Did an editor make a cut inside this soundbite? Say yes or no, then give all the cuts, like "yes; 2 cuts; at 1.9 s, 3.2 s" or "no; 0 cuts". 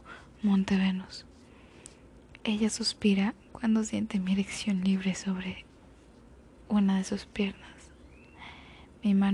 no; 0 cuts